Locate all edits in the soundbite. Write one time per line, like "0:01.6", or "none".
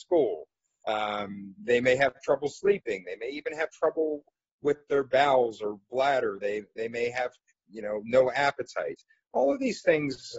none